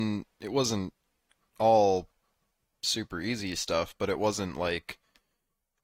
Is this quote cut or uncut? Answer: uncut